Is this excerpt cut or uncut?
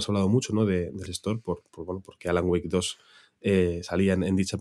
cut